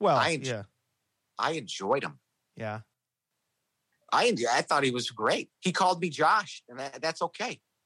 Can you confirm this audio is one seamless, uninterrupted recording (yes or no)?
no